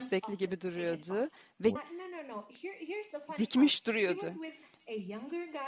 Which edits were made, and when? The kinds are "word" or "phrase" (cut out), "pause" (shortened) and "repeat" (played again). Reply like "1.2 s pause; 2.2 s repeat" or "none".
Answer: 1.8 s phrase